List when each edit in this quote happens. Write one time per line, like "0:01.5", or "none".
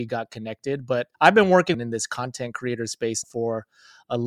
0:01.1
0:01.7
0:03.2